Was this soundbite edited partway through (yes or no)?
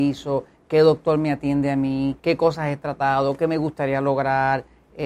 yes